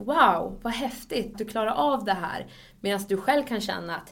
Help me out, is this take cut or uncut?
cut